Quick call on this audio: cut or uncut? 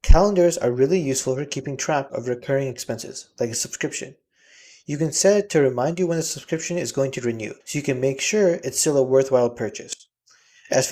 cut